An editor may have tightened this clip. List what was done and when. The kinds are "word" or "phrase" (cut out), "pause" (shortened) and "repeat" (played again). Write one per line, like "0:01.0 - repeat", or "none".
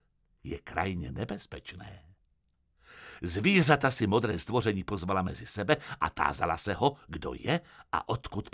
none